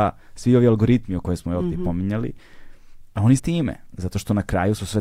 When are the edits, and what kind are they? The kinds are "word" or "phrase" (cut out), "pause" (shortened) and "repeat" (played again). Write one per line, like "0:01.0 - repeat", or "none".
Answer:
0:01.2 - word
0:03.4 - phrase